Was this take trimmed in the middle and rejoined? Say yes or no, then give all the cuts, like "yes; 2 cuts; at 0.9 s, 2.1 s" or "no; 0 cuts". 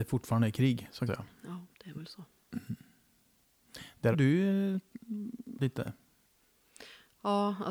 yes; 3 cuts; at 1.1 s, 4.1 s, 5.6 s